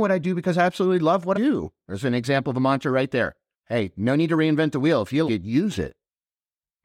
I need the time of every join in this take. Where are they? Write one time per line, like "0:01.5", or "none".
0:01.3
0:03.5
0:05.3